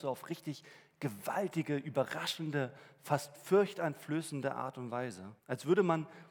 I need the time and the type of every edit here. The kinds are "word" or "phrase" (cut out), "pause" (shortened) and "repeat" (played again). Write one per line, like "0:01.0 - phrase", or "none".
0:05.4 - pause